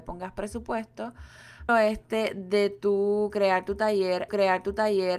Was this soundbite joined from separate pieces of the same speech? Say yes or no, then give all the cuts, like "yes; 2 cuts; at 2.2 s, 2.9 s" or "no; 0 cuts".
yes; 2 cuts; at 1.7 s, 4.3 s